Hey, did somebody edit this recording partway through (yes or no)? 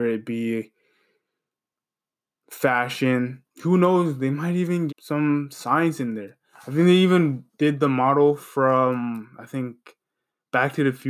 yes